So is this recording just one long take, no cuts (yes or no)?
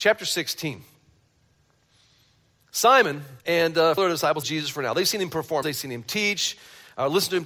no